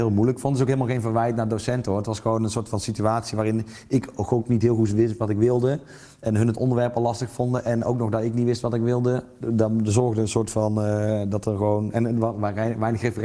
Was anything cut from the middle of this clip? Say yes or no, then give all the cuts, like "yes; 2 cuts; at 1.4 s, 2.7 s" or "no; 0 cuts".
yes; 1 cut; at 9.4 s